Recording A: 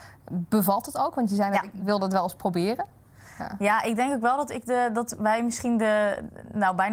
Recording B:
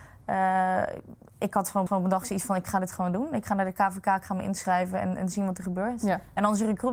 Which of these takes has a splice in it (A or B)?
B